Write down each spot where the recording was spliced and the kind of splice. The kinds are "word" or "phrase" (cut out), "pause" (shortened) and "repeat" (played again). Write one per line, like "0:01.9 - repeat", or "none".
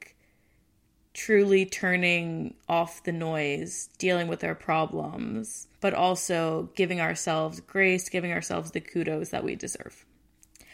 0:05.8 - pause